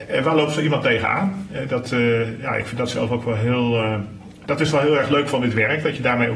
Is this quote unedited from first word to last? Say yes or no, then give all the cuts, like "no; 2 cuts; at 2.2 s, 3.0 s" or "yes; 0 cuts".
yes; 0 cuts